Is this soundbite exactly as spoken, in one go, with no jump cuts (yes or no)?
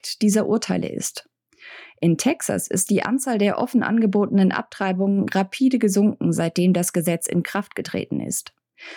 yes